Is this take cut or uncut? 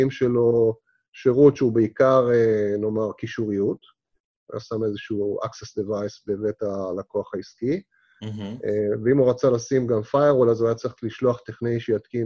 uncut